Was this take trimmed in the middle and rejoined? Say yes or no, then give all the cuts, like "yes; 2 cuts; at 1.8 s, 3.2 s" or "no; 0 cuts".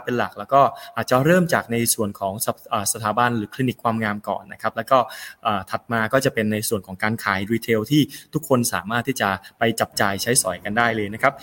no; 0 cuts